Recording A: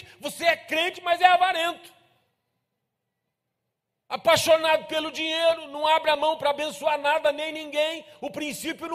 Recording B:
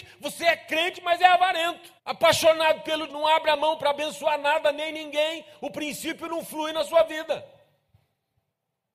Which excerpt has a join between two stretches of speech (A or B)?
B